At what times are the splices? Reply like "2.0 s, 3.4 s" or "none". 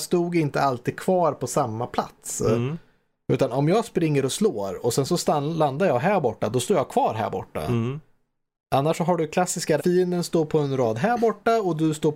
9.8 s